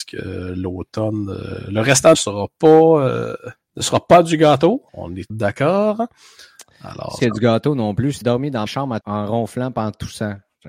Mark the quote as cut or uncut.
cut